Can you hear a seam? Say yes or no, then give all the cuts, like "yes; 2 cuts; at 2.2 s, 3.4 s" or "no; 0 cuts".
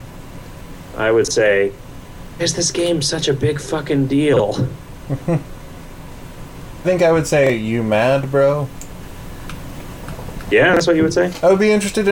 yes; 2 cuts; at 2.4 s, 6.8 s